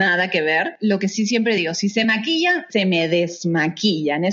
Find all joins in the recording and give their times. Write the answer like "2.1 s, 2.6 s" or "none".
none